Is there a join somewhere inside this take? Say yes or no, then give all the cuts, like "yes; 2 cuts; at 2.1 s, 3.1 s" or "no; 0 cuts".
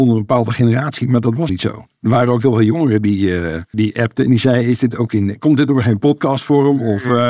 yes; 2 cuts; at 1.5 s, 3.7 s